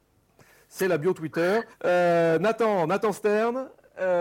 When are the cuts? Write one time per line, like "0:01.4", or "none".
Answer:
0:01.7